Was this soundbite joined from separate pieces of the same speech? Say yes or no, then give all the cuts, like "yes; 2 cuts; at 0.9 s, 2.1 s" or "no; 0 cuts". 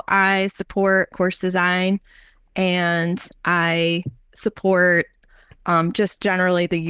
yes; 1 cut; at 1.1 s